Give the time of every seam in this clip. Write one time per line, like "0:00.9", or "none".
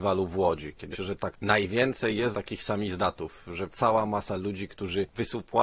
0:00.9
0:01.3
0:02.3
0:03.7